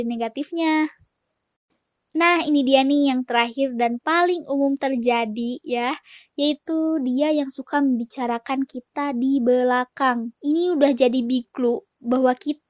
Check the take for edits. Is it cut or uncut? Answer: cut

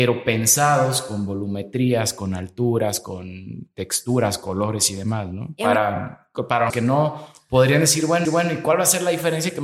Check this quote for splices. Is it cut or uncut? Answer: cut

